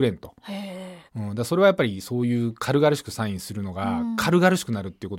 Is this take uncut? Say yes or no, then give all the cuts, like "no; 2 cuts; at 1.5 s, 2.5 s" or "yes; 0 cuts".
no; 1 cut; at 1.1 s